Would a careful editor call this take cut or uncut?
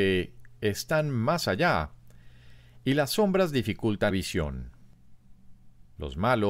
cut